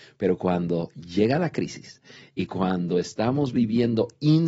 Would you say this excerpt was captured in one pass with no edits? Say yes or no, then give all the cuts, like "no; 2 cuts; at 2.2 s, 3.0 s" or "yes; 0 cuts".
yes; 0 cuts